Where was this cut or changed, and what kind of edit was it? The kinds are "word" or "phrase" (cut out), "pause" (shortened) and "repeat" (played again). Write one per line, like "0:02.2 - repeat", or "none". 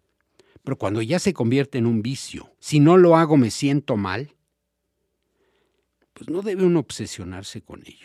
0:02.6 - pause